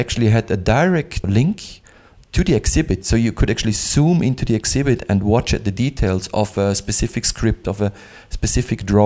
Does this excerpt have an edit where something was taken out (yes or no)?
yes